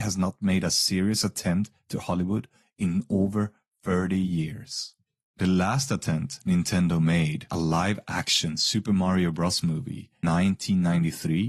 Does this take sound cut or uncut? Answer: cut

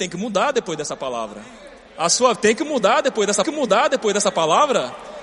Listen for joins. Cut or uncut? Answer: cut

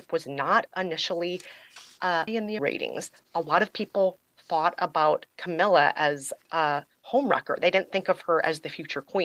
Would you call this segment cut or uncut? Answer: cut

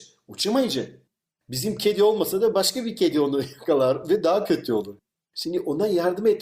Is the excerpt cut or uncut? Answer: uncut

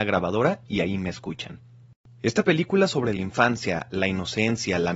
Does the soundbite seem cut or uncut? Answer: uncut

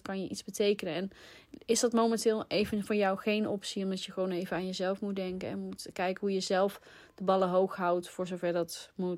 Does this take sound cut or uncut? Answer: uncut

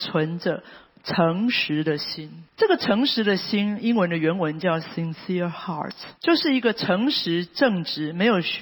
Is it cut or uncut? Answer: cut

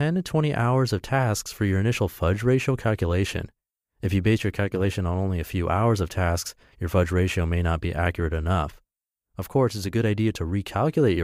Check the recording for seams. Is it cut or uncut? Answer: uncut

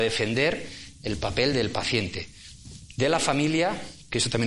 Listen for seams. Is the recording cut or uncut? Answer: uncut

